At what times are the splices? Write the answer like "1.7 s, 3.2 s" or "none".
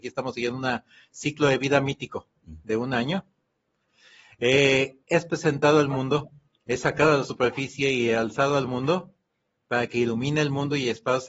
none